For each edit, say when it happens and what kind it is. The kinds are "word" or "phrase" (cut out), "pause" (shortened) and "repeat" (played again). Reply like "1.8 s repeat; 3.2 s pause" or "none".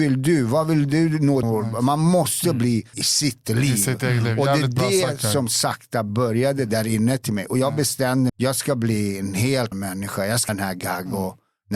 1.4 s word; 2.9 s word; 8.3 s word; 9.7 s word; 10.5 s word